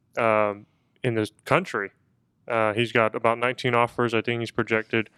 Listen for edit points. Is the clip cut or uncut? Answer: uncut